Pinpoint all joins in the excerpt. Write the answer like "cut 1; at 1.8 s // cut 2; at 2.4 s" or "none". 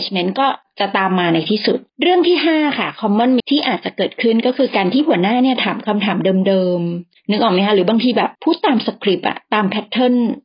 cut 1; at 1.9 s // cut 2; at 3.4 s // cut 3; at 8.3 s